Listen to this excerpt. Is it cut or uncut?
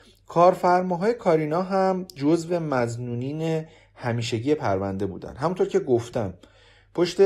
uncut